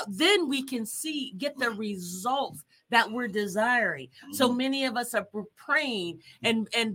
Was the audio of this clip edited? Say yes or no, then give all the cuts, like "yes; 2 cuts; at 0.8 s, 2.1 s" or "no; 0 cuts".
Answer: no; 0 cuts